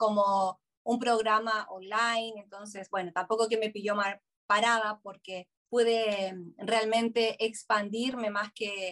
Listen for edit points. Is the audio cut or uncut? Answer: cut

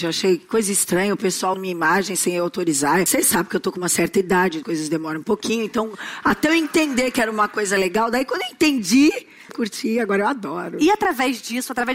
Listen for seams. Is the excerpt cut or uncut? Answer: cut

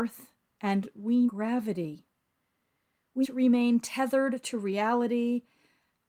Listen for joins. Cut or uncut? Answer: cut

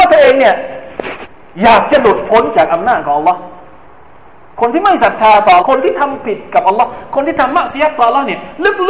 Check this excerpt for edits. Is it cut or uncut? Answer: cut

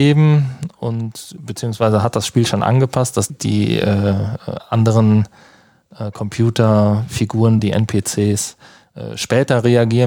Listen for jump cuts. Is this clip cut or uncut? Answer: cut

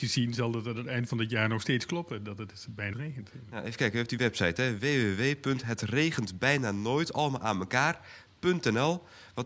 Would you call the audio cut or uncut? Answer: cut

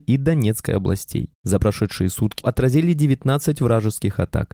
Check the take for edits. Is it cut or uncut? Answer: cut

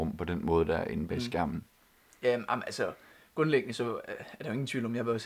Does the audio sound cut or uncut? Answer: uncut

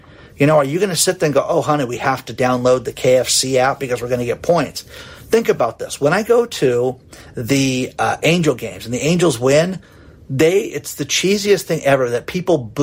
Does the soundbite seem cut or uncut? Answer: uncut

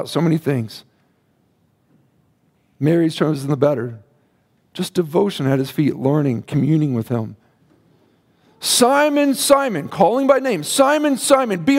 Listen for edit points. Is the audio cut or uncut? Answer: uncut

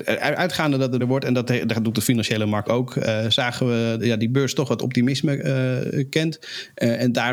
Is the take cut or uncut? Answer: cut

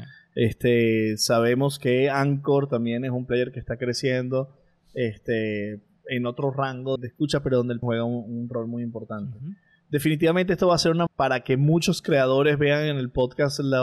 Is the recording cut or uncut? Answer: cut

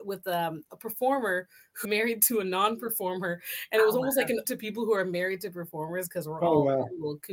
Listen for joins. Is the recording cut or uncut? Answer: cut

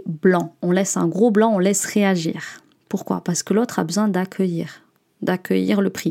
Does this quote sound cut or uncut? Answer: uncut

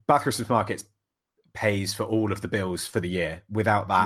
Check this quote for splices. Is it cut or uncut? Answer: uncut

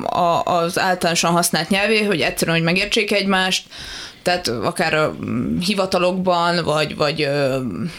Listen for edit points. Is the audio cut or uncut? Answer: uncut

